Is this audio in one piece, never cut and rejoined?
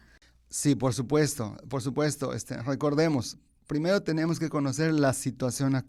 yes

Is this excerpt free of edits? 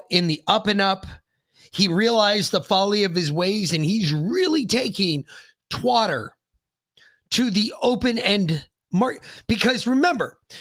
yes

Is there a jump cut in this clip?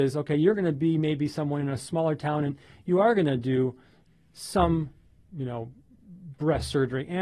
no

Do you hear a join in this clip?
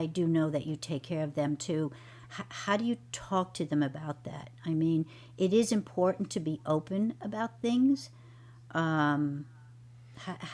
no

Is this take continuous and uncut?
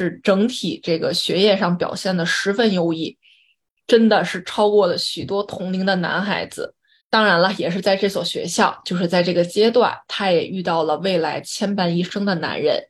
yes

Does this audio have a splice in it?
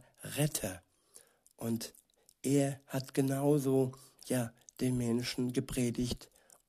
no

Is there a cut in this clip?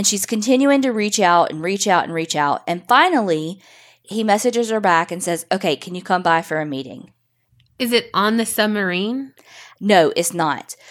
no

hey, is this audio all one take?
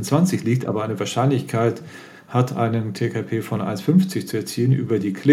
yes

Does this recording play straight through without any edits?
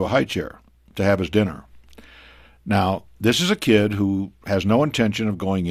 yes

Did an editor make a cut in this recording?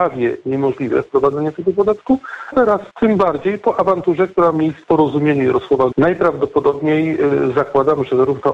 yes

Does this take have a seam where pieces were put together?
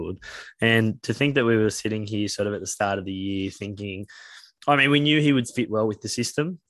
no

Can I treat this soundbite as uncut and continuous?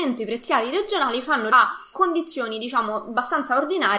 no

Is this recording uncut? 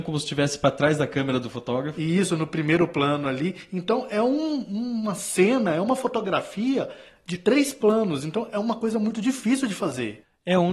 yes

